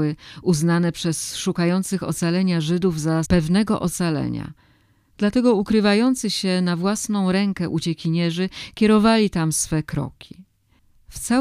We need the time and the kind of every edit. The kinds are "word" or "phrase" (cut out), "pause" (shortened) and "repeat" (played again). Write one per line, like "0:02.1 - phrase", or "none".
0:03.2 - word